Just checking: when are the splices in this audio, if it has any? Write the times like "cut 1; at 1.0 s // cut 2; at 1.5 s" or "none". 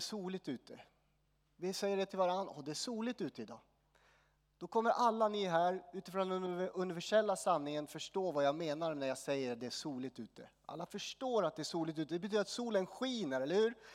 none